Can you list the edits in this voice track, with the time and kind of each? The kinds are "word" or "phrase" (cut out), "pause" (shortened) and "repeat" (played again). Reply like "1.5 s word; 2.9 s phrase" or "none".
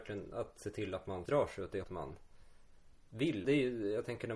1.3 s word; 1.8 s word; 3.4 s word